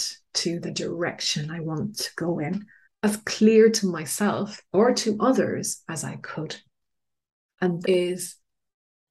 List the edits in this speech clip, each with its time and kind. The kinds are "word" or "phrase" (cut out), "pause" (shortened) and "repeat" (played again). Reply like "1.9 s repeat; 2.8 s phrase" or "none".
2.8 s pause; 7.8 s word